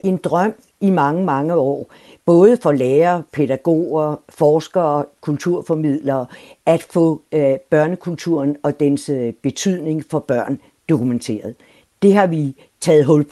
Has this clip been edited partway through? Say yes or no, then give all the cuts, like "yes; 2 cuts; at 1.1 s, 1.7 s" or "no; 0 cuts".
no; 0 cuts